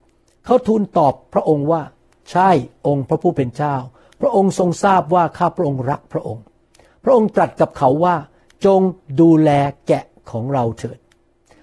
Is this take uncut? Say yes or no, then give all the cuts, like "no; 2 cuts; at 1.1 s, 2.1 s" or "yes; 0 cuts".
yes; 0 cuts